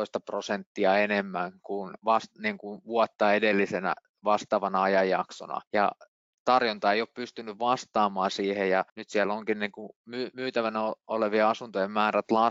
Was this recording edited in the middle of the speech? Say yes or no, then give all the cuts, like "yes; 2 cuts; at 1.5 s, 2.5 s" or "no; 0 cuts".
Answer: yes; 2 cuts; at 5.7 s, 8.9 s